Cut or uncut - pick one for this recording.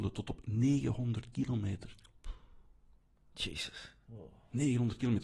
uncut